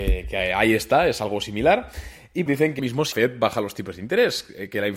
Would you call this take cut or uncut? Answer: cut